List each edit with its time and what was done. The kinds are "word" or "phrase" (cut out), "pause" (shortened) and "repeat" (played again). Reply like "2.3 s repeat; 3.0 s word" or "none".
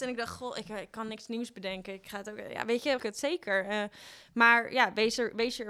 3.0 s word